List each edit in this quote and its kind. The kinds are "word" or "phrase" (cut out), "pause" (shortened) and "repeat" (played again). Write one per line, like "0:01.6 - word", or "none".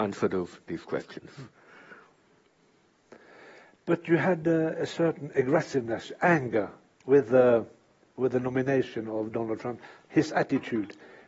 none